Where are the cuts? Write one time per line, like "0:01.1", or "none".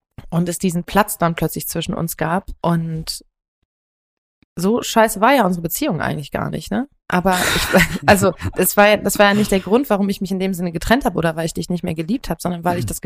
0:02.6